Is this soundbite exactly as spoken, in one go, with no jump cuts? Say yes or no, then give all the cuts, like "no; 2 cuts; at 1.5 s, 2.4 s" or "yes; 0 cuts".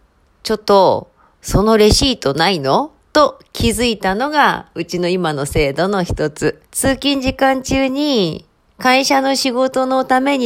no; 1 cut; at 6.7 s